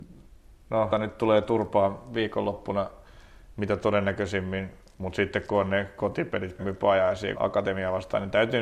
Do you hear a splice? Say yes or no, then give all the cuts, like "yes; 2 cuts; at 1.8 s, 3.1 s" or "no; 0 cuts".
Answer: yes; 3 cuts; at 0.9 s, 6.6 s, 7.3 s